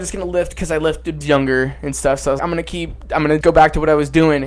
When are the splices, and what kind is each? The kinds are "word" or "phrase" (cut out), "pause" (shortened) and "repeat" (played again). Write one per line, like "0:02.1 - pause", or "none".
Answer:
0:01.2 - phrase
0:02.4 - word
0:03.4 - word